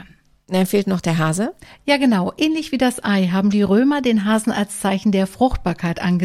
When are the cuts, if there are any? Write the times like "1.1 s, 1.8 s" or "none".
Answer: 3.5 s